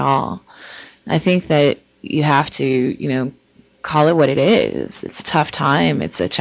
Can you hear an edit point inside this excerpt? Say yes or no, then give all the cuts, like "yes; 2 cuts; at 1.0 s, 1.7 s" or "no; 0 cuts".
no; 0 cuts